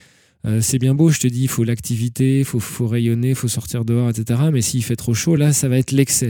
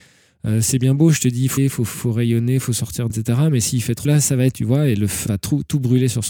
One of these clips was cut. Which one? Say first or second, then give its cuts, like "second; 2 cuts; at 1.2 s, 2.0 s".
second; 5 cuts; at 1.6 s, 3.1 s, 4.0 s, 4.5 s, 5.3 s